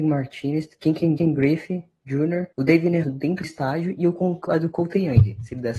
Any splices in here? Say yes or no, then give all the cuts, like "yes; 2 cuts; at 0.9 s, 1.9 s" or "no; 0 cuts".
yes; 5 cuts; at 1.2 s, 2.5 s, 3.0 s, 3.4 s, 4.5 s